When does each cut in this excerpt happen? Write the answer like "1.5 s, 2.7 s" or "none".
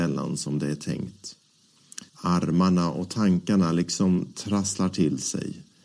2.1 s